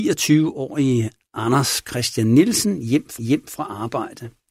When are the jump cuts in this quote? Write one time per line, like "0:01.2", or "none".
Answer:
0:03.2